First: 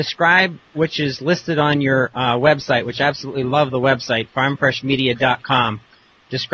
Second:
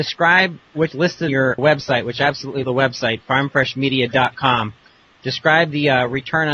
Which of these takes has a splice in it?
second; 4 cuts; at 0.9 s, 1.3 s, 1.6 s, 2.6 s

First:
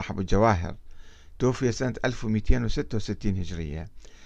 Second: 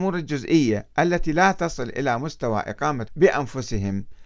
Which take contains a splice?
second; 1 cut; at 3.1 s

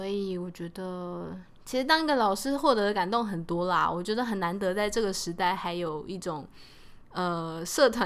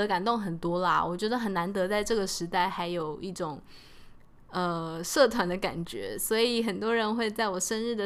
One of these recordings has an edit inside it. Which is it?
first; 1 cut; at 7.1 s

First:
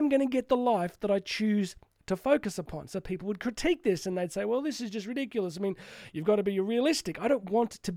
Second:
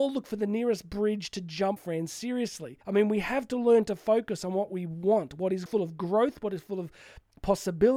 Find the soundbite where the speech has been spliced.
second; 3 cuts; at 1.8 s, 2.8 s, 5.7 s

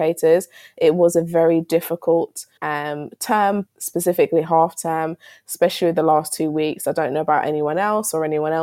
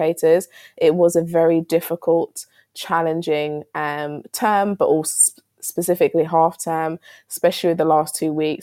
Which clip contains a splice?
first; 2 cuts; at 2.6 s, 3.7 s

